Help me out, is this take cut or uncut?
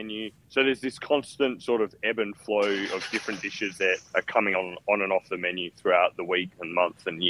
uncut